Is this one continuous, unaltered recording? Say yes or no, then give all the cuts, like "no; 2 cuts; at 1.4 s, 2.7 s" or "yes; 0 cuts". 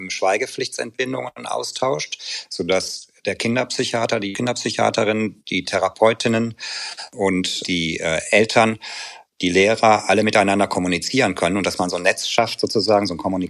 yes; 0 cuts